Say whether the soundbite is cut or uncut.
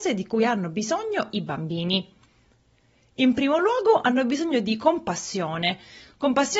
uncut